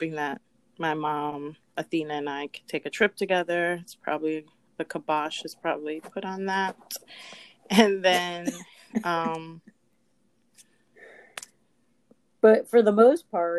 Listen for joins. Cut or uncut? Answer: uncut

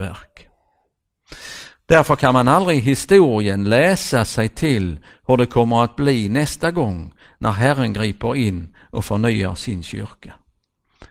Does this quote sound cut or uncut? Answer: uncut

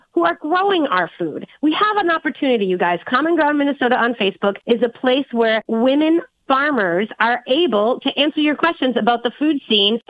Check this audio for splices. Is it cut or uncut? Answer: uncut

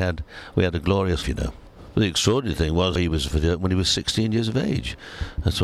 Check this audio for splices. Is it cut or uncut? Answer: cut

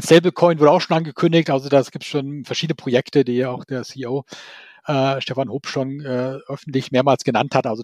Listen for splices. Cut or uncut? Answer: uncut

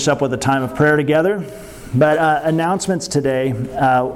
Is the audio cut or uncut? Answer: uncut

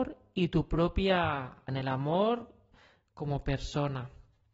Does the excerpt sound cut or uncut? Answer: cut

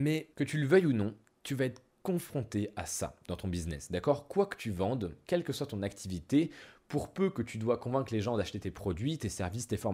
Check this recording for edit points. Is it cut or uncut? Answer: uncut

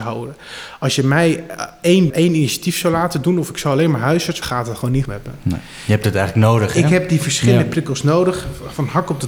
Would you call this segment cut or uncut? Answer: cut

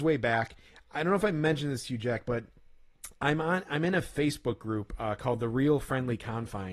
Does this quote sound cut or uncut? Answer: uncut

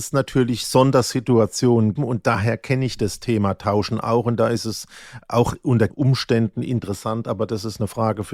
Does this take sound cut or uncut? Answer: cut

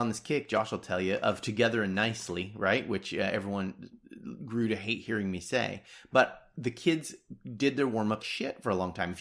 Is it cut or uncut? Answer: cut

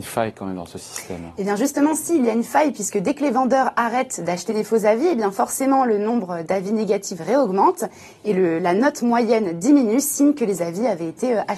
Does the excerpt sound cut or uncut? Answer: uncut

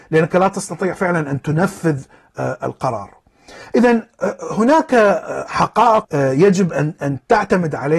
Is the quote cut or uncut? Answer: cut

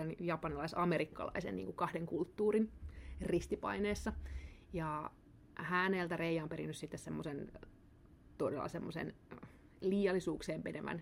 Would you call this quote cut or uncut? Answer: cut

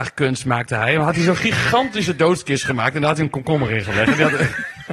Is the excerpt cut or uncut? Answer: uncut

